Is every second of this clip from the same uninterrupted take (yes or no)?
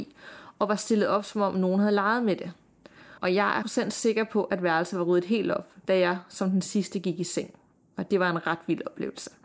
no